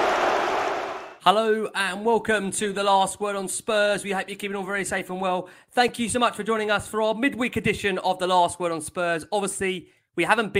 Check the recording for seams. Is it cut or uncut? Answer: uncut